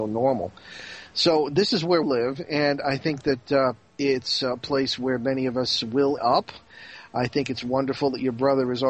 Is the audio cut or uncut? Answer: cut